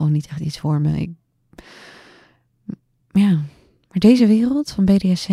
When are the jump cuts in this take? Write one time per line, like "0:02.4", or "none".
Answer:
none